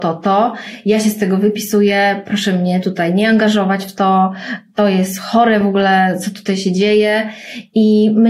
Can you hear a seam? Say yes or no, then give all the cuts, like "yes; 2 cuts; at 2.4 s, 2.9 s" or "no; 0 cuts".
no; 0 cuts